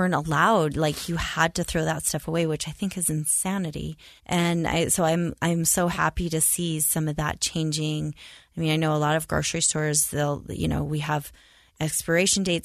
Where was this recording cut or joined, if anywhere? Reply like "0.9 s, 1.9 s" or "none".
4.2 s

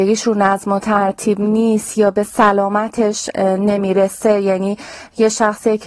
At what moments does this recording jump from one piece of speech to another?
none

